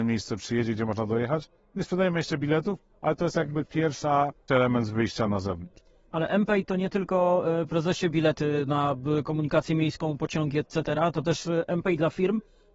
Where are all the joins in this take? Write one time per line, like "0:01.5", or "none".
0:04.5
0:05.3
0:07.7